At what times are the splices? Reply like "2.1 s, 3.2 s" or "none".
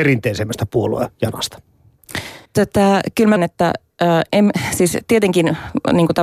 2.5 s, 3.4 s, 4.3 s